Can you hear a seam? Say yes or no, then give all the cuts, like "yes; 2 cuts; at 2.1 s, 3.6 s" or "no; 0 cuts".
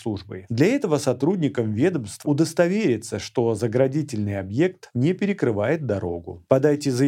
yes; 1 cut; at 2.2 s